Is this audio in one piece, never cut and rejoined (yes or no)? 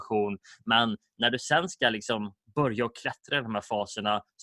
yes